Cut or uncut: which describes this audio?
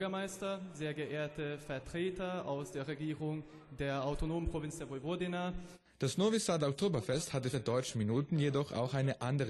cut